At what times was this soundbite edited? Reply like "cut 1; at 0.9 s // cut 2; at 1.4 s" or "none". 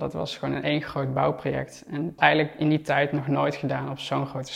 cut 1; at 2.2 s